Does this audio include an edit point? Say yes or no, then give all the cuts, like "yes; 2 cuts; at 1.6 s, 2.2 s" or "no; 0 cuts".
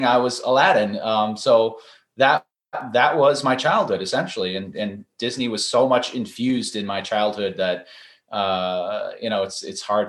no; 0 cuts